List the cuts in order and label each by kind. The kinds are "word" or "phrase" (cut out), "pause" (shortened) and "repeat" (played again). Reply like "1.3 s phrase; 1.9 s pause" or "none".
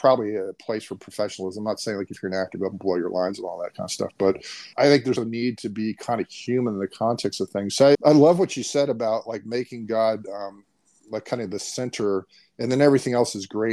4.7 s word; 5.2 s word; 7.9 s word